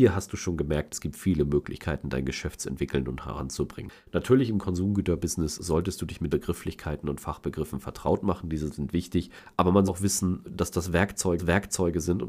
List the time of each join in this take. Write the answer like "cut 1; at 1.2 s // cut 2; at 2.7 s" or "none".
cut 1; at 6.3 s // cut 2; at 9.9 s // cut 3; at 11.4 s